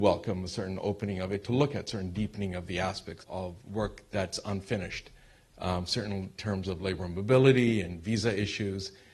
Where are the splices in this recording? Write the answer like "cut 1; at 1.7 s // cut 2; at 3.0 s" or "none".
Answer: cut 1; at 3.2 s

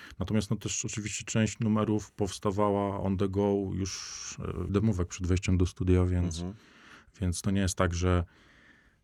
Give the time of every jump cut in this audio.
cut 1; at 4.7 s

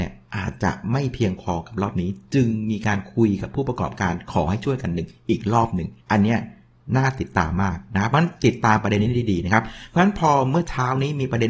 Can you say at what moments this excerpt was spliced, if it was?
cut 1; at 6.0 s

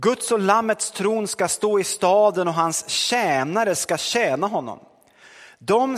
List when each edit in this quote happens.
none

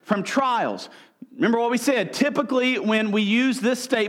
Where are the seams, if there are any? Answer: none

